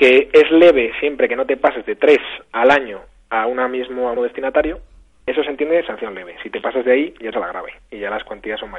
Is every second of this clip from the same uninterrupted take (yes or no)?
no